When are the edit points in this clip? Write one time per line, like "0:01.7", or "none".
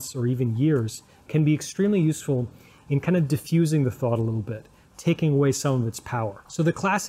none